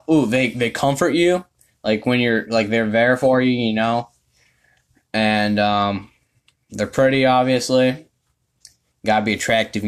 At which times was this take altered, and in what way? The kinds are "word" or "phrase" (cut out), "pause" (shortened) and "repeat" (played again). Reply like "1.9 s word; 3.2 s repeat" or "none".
none